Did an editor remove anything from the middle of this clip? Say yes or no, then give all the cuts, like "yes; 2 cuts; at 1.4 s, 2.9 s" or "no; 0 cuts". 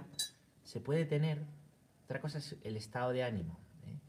no; 0 cuts